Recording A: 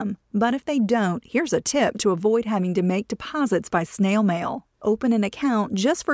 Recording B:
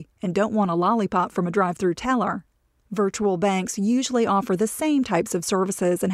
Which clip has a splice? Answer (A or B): A